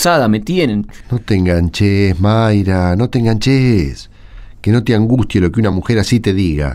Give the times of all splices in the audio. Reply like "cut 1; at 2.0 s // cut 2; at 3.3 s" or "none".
none